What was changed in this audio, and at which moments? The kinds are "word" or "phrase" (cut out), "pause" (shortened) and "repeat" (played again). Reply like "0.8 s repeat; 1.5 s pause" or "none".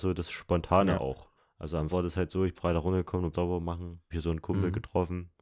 1.4 s pause; 1.9 s word; 2.6 s word; 3.3 s word; 4.1 s word